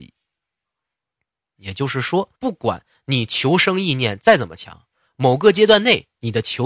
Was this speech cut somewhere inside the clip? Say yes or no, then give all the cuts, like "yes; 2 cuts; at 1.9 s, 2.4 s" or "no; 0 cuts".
yes; 1 cut; at 2.4 s